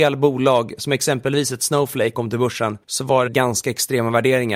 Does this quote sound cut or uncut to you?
cut